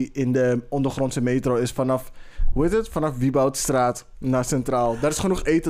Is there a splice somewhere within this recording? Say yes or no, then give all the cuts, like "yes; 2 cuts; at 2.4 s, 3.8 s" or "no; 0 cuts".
no; 0 cuts